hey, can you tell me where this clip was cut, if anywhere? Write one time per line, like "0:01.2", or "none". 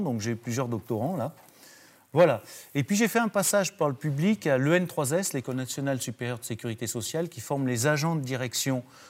none